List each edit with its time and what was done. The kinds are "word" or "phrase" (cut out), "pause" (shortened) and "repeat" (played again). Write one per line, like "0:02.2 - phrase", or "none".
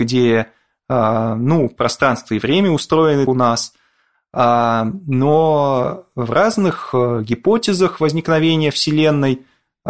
0:03.3 - phrase